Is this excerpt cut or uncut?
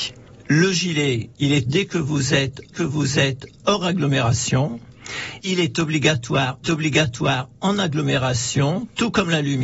cut